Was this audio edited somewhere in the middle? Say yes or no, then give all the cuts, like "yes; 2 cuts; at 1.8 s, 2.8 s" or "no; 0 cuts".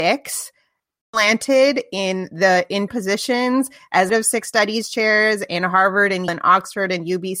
yes; 3 cuts; at 2.9 s, 4.1 s, 6.3 s